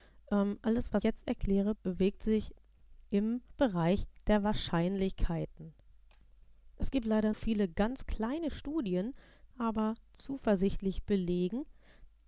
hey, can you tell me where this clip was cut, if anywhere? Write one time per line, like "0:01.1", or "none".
0:01.0
0:01.8
0:03.5
0:07.3
0:09.5